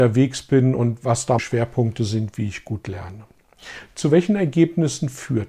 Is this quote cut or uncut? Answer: cut